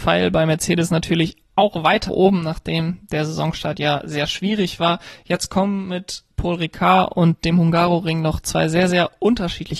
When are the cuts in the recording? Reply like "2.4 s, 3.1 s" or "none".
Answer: 2.1 s, 6.3 s